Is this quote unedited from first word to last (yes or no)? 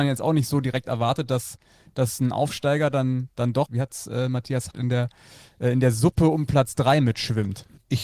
no